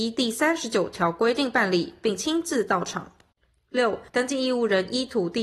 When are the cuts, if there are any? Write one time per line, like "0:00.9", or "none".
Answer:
0:04.1